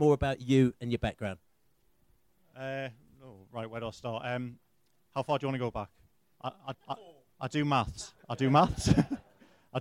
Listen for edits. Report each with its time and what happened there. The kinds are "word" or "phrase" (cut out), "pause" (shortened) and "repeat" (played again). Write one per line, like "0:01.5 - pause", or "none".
0:06.7 - word